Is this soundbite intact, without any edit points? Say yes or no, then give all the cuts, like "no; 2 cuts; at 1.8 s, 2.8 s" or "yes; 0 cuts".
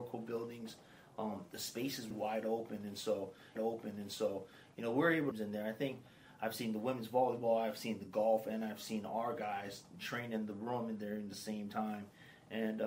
no; 3 cuts; at 2.1 s, 3.6 s, 5.3 s